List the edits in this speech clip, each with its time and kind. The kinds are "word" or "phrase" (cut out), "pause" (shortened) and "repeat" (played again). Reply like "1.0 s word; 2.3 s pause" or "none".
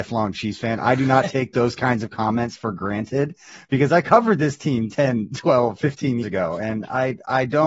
6.2 s word